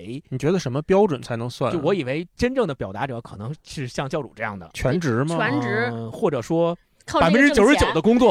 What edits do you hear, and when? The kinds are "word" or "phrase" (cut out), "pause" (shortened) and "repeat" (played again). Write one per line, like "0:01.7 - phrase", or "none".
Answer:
0:03.6 - pause